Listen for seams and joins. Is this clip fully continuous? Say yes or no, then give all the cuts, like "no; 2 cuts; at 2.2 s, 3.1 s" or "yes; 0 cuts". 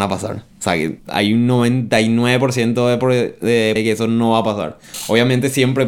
no; 2 cuts; at 1.0 s, 3.8 s